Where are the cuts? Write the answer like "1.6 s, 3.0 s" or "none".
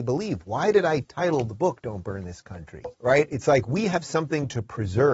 2.9 s